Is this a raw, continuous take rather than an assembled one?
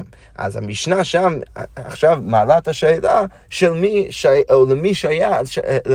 yes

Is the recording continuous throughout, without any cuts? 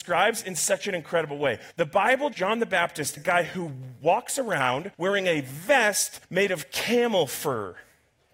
no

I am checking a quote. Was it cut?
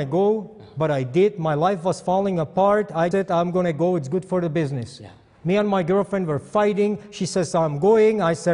yes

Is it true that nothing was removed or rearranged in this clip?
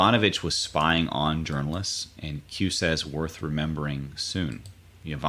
yes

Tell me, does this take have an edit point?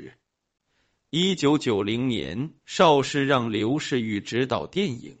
no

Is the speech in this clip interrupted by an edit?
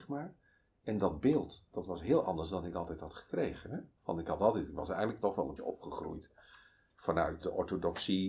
yes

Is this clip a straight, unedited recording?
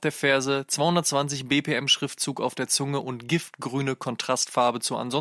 yes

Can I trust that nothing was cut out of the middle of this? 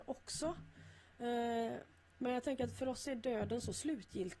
yes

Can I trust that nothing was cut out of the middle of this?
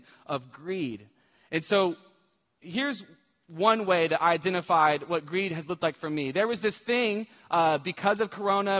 yes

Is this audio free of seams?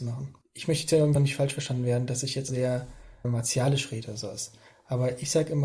no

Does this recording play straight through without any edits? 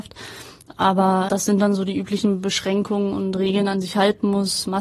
no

